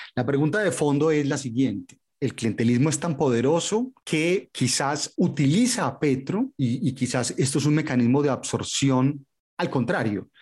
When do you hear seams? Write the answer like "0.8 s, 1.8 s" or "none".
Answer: none